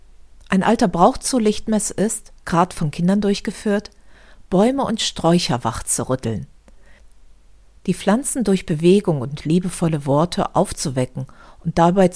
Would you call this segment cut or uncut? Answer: cut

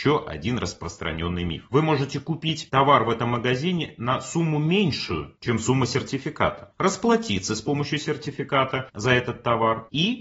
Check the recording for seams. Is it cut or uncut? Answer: uncut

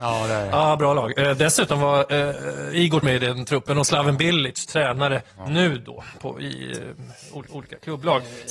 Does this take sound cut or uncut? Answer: cut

